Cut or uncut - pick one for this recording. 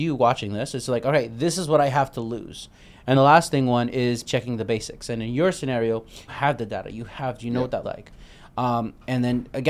cut